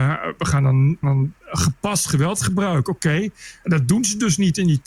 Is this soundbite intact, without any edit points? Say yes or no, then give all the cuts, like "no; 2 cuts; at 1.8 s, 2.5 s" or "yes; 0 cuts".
no; 2 cuts; at 1.0 s, 1.4 s